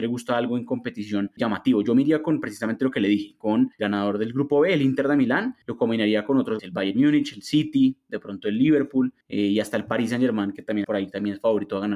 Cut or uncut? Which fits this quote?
cut